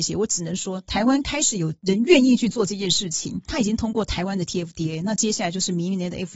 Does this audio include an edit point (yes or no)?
no